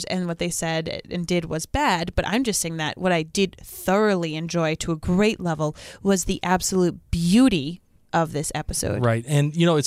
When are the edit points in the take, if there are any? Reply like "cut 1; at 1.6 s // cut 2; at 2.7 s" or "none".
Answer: none